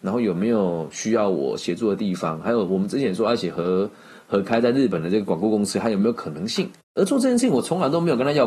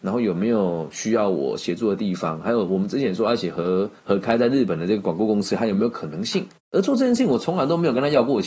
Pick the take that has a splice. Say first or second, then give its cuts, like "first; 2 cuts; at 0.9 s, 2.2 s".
second; 1 cut; at 4.0 s